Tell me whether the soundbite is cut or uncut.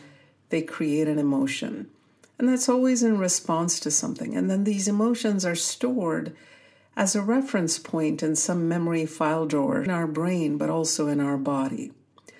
cut